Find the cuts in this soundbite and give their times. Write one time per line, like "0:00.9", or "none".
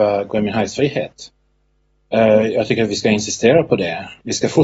none